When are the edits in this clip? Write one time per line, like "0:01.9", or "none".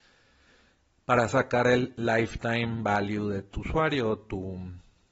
none

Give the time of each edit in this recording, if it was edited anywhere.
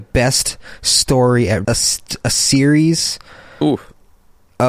0:01.6

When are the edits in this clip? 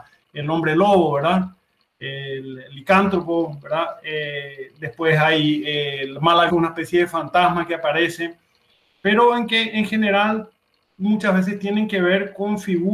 0:06.5

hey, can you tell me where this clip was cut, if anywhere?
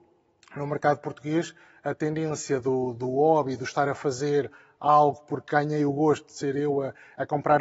none

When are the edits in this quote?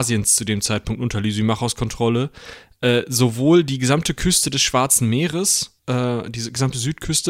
0:05.8

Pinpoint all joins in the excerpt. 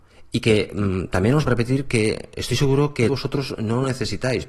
0:01.5
0:03.1

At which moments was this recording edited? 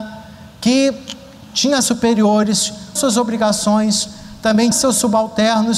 0:01.8
0:03.0
0:04.7

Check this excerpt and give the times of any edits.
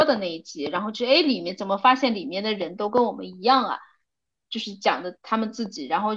none

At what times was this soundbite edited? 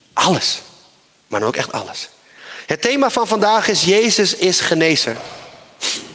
none

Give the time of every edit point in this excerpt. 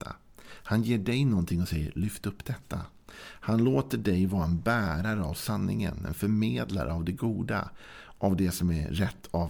none

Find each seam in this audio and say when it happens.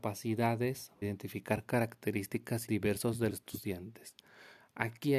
0:01.0
0:02.7
0:03.3

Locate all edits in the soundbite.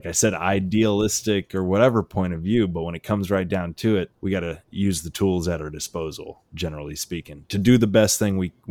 0:04.1

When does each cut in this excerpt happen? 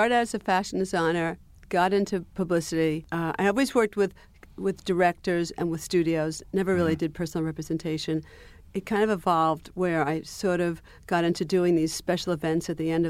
none

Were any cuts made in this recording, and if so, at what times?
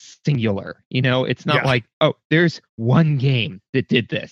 0:01.9
0:02.7

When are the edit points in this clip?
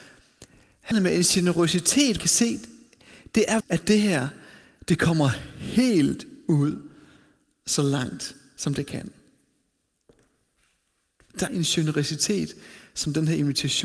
0:00.9
0:02.2
0:03.6
0:11.5

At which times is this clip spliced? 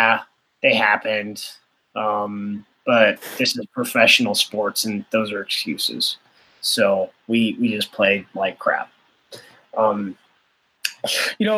none

